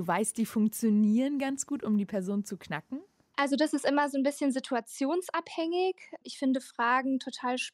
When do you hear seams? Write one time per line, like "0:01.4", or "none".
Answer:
none